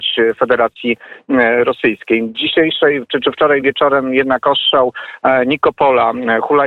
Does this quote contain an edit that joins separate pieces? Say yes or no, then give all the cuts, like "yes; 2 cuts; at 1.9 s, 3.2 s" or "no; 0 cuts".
no; 0 cuts